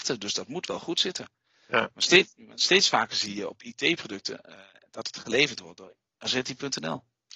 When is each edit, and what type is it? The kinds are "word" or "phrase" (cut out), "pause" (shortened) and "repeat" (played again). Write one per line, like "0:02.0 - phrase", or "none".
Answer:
none